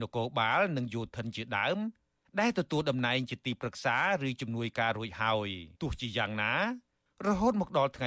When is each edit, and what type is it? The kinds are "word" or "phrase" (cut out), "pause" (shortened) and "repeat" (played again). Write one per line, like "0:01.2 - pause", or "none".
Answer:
0:05.7 - pause